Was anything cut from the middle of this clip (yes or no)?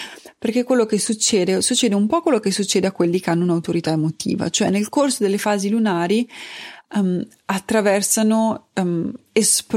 no